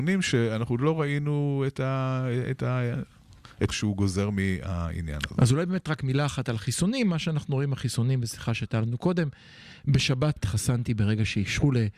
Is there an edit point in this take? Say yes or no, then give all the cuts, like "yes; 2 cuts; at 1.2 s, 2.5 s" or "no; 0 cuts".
yes; 2 cuts; at 3.7 s, 10.4 s